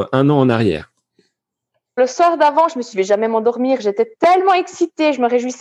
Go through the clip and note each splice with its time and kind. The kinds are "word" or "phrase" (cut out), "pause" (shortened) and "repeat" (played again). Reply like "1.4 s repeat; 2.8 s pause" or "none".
2.0 s word; 2.9 s phrase